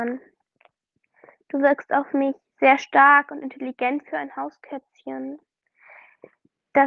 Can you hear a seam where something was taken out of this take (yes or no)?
no